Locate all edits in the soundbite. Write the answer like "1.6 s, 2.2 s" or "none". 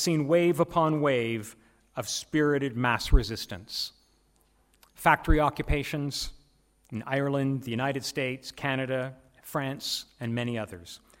none